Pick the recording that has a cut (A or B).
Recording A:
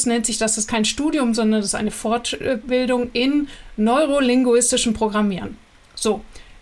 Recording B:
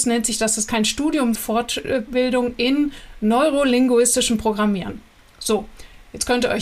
B